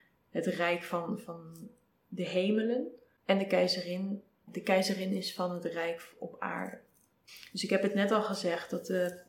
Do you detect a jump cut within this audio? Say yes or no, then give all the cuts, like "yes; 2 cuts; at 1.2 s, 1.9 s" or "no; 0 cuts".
no; 0 cuts